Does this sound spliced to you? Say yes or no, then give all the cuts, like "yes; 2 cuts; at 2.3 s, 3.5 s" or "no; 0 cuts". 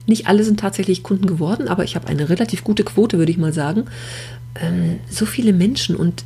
no; 0 cuts